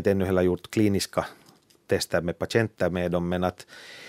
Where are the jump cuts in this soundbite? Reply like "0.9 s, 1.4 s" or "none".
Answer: none

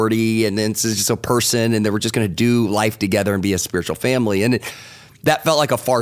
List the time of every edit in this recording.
none

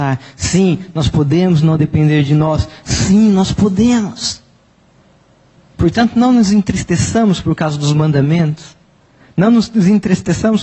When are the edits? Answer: none

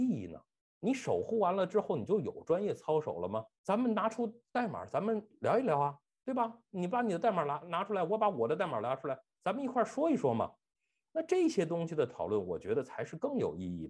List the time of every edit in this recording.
none

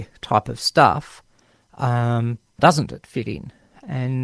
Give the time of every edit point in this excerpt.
2.6 s

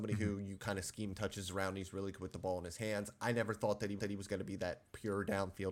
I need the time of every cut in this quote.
4.0 s

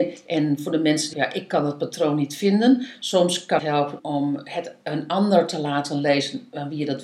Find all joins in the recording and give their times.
1.1 s, 3.6 s, 4.0 s

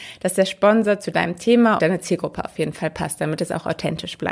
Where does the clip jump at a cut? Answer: 1.8 s

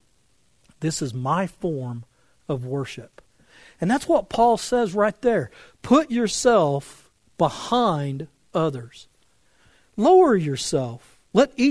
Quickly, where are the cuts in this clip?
none

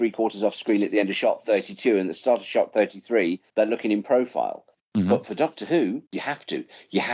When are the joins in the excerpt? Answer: 3.5 s, 4.7 s, 6.1 s

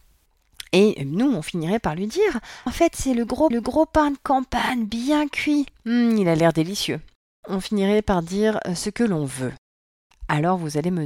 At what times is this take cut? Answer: 2.7 s, 3.5 s, 7.1 s

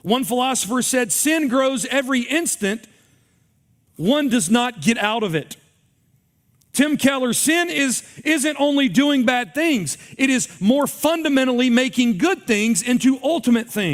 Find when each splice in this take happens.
none

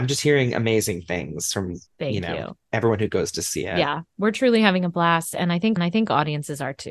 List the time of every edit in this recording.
1.9 s, 5.8 s

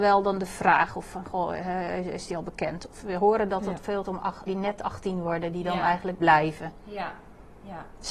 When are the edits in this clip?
4.0 s, 4.5 s, 6.2 s

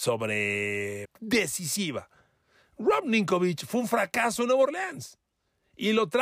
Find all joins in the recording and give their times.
1.0 s

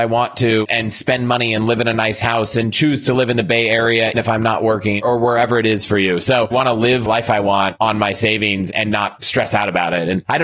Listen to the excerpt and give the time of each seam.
4.1 s, 6.5 s, 7.1 s

